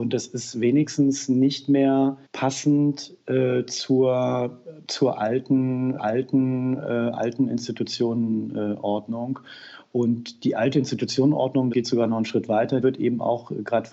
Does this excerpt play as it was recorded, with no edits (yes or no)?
no